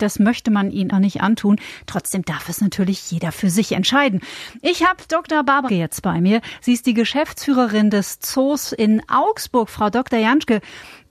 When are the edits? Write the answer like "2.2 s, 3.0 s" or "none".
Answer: 0.9 s, 5.7 s